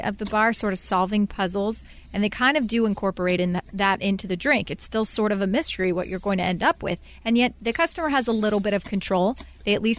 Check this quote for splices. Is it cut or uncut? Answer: uncut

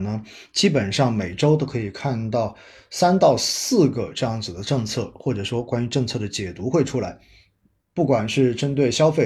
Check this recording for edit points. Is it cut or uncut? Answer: uncut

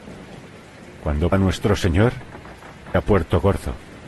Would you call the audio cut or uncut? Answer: cut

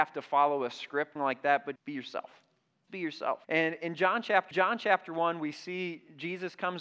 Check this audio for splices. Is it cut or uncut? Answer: cut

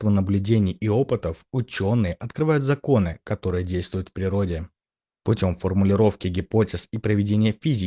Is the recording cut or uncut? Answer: uncut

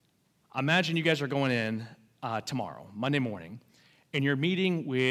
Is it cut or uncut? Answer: uncut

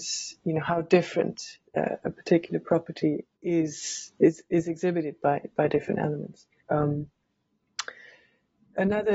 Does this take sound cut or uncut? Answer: cut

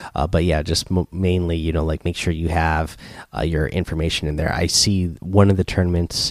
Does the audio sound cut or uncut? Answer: uncut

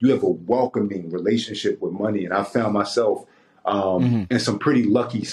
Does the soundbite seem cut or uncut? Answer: uncut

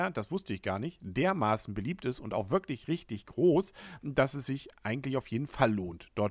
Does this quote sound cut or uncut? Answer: uncut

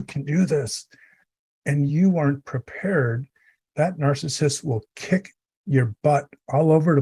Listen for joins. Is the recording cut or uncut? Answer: uncut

